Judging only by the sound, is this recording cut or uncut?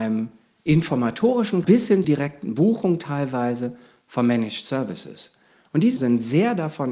cut